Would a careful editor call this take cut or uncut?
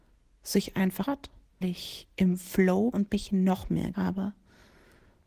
cut